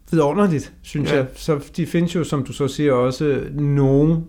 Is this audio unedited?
yes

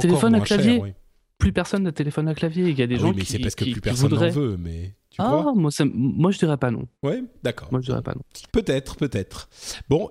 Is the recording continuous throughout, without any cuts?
no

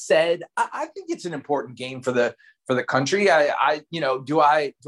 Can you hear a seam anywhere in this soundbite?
no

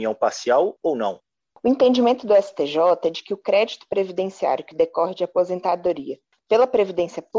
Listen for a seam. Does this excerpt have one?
no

